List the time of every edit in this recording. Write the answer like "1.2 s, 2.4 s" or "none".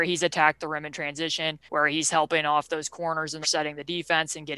1.7 s, 3.4 s